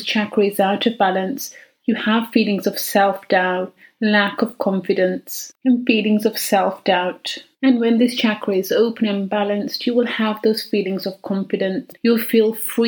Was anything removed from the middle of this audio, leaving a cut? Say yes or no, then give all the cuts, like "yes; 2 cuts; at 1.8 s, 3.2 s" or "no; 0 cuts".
yes; 1 cut; at 5.6 s